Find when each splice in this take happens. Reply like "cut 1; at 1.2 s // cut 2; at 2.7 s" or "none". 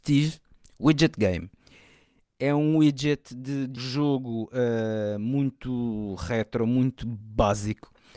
cut 1; at 3.8 s